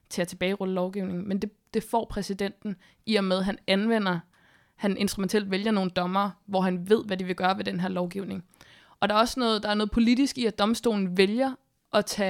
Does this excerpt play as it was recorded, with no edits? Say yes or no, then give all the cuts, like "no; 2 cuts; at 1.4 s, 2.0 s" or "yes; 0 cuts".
yes; 0 cuts